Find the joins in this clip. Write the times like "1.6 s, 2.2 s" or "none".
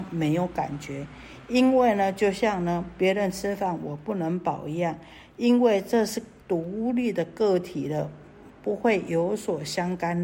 6.4 s